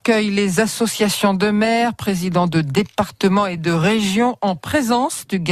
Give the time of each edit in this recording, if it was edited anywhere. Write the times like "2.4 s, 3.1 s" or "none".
none